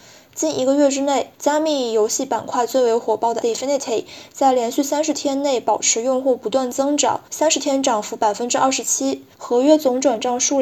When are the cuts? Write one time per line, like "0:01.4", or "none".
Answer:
0:01.3
0:03.4
0:07.3
0:09.3